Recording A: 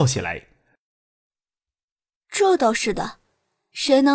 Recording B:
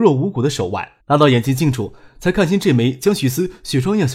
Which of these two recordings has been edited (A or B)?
B